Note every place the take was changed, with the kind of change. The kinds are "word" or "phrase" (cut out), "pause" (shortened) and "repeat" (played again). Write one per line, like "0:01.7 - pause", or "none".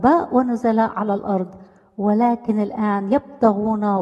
none